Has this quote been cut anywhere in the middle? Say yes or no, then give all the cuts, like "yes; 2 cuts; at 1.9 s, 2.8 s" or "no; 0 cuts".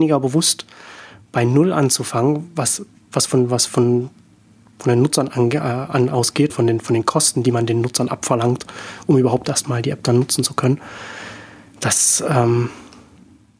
yes; 1 cut; at 6.5 s